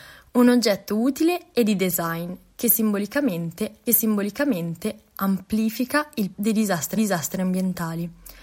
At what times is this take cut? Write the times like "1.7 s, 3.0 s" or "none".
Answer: 3.9 s, 6.3 s, 7.0 s